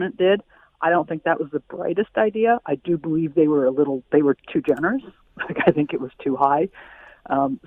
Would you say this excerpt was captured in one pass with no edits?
yes; 0 cuts

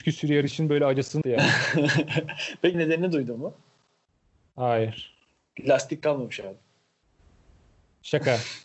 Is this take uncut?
no; 2 cuts; at 1.2 s, 2.7 s

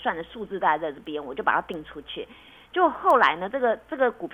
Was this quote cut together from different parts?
no; 0 cuts

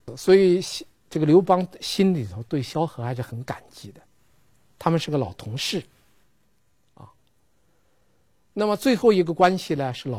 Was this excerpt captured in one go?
yes; 0 cuts

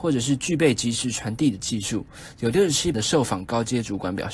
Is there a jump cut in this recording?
yes; 1 cut; at 2.9 s

